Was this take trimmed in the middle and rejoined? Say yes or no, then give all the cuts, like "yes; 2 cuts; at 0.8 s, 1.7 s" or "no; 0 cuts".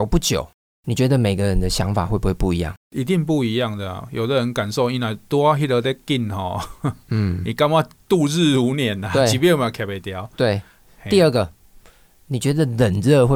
yes; 1 cut; at 2.8 s